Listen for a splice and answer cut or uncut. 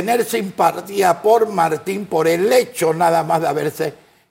uncut